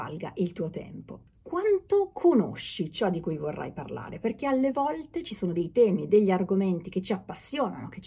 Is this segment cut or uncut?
uncut